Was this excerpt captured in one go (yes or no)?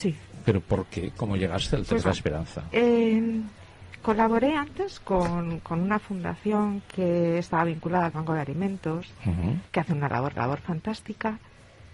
no